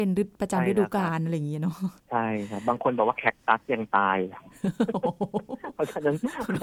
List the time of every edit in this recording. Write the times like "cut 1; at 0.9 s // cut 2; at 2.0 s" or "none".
cut 1; at 2.0 s